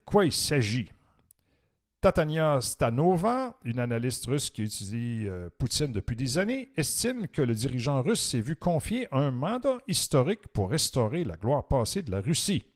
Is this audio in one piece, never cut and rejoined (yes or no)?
yes